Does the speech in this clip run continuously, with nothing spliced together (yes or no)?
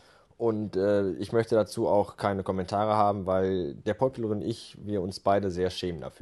yes